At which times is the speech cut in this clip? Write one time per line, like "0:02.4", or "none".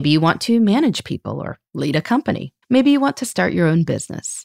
0:02.6